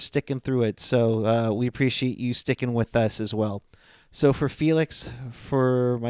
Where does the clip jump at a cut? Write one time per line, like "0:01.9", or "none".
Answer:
none